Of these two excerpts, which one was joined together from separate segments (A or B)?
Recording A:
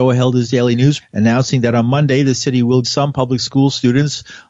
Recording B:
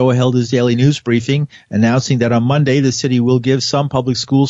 A